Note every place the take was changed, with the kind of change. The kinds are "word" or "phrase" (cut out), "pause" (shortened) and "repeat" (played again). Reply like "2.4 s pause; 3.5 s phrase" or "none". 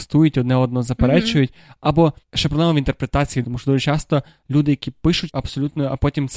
2.2 s pause; 3.4 s word; 5.3 s word